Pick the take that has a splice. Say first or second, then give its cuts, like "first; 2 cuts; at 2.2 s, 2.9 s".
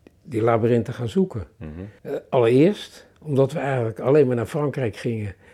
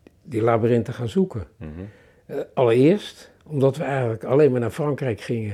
first; 1 cut; at 2.0 s